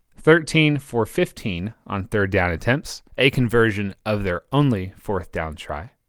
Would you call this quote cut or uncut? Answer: cut